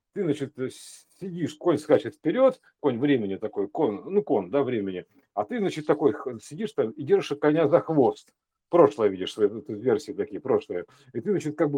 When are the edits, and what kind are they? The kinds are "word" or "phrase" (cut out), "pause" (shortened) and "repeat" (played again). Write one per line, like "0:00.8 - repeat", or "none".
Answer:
none